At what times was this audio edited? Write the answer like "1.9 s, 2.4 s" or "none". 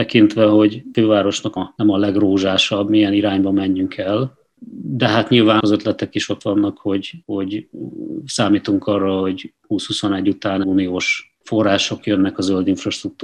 1.6 s, 5.6 s, 7.2 s, 10.6 s, 11.4 s